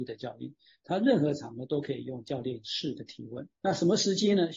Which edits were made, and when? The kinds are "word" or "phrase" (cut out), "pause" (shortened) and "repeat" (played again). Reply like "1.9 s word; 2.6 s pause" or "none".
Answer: 3.6 s pause